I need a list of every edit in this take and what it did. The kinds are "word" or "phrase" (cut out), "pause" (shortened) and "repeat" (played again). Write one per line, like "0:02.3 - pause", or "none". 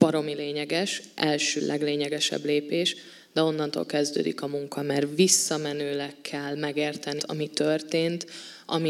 0:01.6 - word
0:07.2 - word